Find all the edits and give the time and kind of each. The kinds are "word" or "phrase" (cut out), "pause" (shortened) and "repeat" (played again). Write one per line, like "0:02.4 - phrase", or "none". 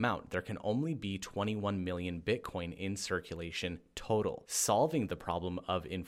none

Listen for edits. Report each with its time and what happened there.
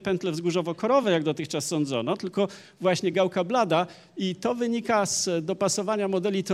none

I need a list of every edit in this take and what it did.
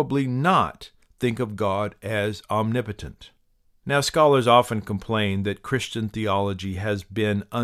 none

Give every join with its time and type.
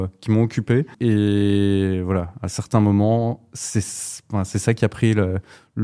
0:00.9 - pause

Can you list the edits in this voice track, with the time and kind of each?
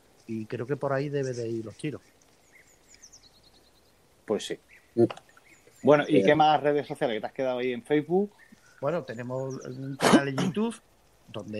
none

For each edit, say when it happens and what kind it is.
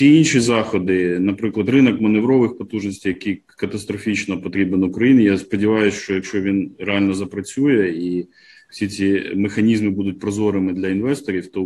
none

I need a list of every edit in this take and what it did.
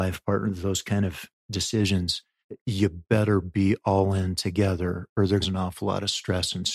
0:05.4 - phrase

